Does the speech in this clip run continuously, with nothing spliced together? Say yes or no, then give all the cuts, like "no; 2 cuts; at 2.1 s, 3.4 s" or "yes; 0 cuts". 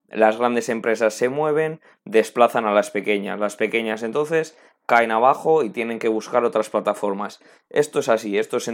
yes; 0 cuts